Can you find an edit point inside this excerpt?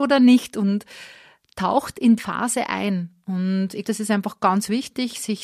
yes; 2 cuts; at 2.2 s, 3.8 s

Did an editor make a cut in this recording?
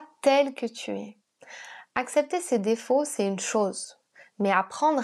no; 0 cuts

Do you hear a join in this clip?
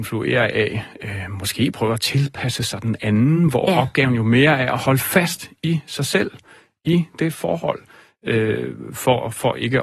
no; 0 cuts

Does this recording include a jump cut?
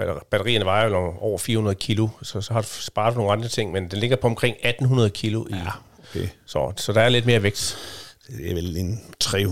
no; 0 cuts

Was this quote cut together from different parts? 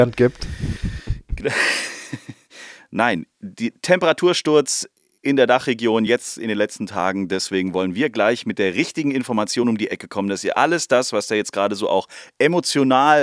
no; 0 cuts

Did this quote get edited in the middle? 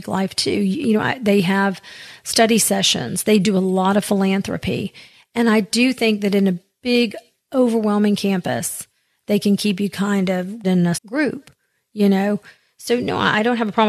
yes; 3 cuts; at 3.4 s, 10.6 s, 10.9 s

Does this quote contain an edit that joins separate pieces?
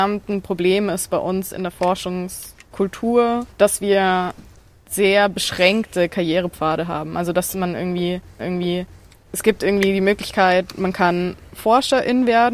yes; 2 cuts; at 3.5 s, 8.4 s

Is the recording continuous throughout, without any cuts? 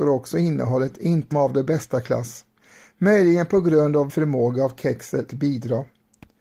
no; 3 cuts; at 1.3 s, 4.1 s, 5.3 s

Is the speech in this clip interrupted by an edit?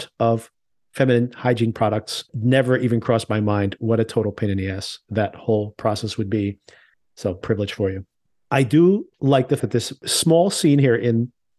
yes; 3 cuts; at 2.3 s, 7.4 s, 9.6 s

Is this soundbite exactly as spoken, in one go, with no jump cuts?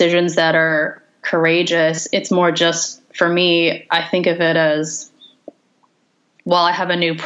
yes; 0 cuts

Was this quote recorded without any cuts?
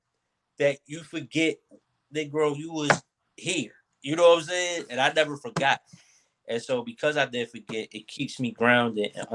yes; 0 cuts

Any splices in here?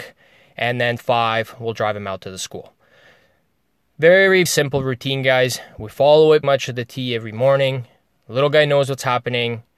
yes; 3 cuts; at 1.0 s, 4.5 s, 6.4 s

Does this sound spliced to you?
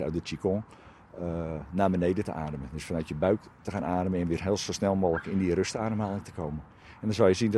no; 0 cuts

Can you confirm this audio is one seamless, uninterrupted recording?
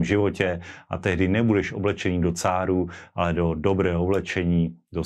yes; 0 cuts

